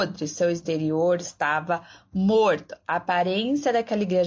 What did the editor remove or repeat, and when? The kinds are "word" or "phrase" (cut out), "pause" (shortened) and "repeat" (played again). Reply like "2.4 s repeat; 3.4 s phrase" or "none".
none